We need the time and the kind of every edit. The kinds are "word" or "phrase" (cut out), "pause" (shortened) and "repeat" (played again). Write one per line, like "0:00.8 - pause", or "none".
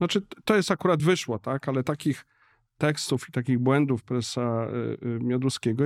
none